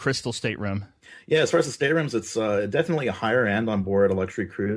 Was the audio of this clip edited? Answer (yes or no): no